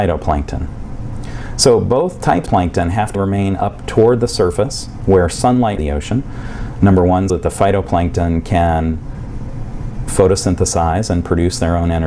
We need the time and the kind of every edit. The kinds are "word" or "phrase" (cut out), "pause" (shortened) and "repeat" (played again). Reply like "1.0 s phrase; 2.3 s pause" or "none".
2.5 s word; 3.1 s word; 5.8 s phrase; 7.3 s word